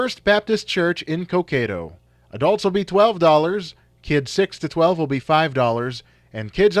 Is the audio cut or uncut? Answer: uncut